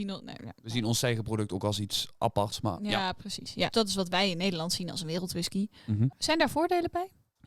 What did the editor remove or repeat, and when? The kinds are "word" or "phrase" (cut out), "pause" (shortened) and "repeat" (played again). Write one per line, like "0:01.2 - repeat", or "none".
0:03.7 - word